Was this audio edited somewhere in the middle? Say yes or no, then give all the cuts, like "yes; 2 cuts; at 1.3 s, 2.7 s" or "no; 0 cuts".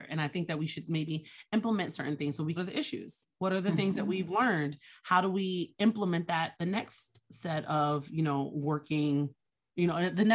yes; 1 cut; at 2.6 s